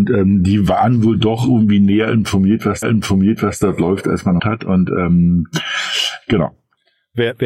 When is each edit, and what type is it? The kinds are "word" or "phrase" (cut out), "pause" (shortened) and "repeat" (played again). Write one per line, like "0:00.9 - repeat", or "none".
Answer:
0:02.8 - repeat
0:04.4 - phrase